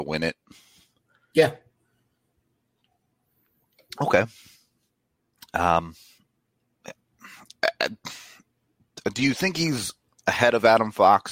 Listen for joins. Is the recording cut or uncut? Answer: uncut